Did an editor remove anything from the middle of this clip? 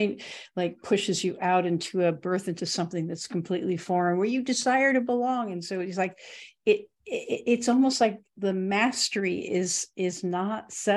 no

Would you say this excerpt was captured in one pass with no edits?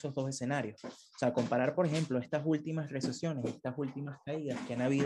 yes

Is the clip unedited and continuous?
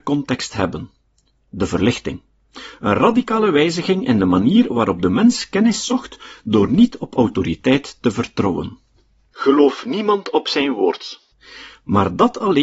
yes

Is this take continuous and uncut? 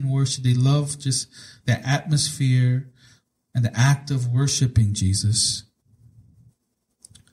yes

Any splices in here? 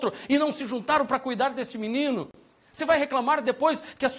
no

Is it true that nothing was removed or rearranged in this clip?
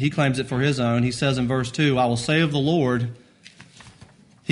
yes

